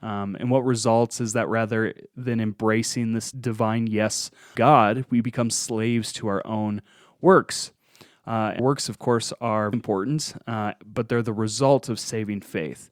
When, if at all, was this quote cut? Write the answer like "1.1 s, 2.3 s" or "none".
3.3 s, 4.5 s, 8.6 s, 9.7 s